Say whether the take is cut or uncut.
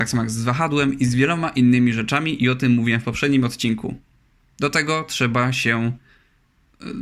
uncut